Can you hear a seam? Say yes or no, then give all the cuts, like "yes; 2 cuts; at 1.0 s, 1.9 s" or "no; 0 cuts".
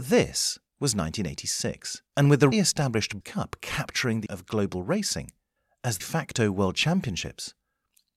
yes; 6 cuts; at 2.1 s, 2.5 s, 3.2 s, 4.3 s, 5.6 s, 6.0 s